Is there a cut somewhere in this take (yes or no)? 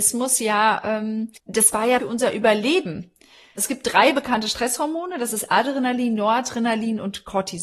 yes